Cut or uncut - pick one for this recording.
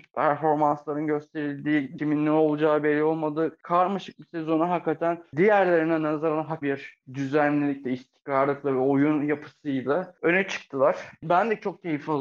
cut